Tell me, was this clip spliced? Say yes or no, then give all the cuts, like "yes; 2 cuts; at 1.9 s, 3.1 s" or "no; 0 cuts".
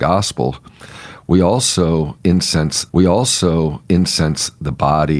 yes; 1 cut; at 2.9 s